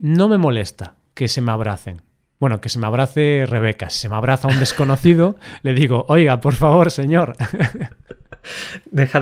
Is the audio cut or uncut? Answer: uncut